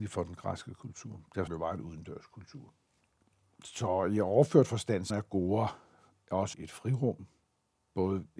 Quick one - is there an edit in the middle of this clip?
yes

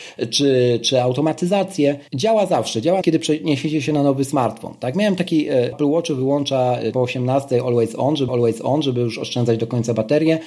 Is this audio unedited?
no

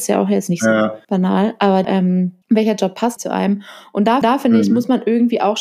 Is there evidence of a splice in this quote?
yes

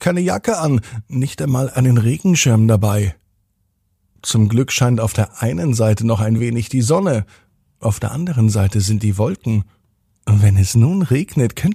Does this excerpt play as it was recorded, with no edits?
yes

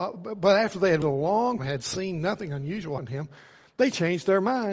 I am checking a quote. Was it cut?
yes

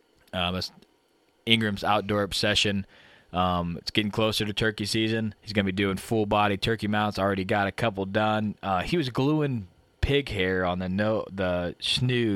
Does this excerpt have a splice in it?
yes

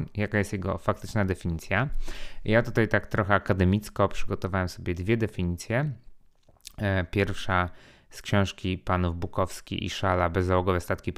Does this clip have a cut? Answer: no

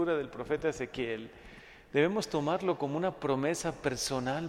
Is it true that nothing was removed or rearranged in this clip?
yes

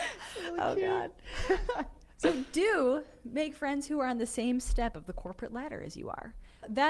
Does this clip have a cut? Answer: no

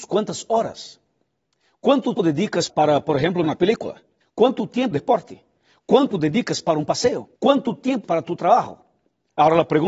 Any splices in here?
yes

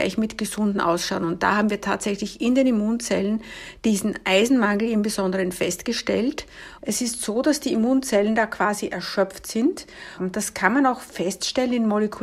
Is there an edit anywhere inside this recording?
no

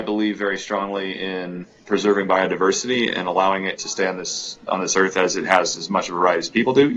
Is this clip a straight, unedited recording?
no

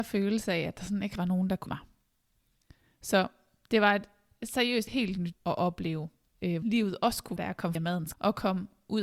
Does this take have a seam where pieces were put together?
yes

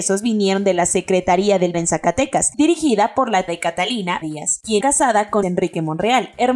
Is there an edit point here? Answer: yes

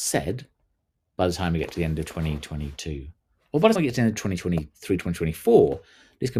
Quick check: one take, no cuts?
no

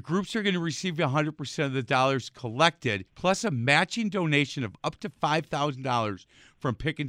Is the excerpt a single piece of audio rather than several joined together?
no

